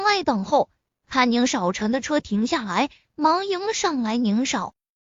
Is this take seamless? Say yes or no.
yes